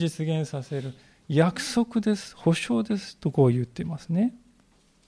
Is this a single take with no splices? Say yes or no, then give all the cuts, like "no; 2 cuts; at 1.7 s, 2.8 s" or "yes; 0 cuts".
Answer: yes; 0 cuts